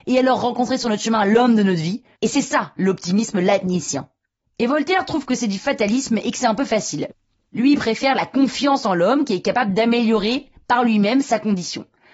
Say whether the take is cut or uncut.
uncut